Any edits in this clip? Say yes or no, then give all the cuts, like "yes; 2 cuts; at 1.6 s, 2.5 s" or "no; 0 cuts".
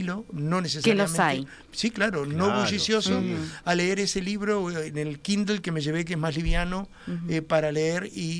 no; 0 cuts